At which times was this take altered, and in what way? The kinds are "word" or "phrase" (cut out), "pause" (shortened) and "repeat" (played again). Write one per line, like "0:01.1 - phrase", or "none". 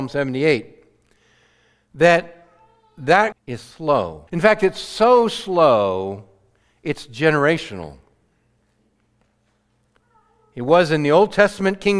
0:03.3 - phrase
0:04.3 - pause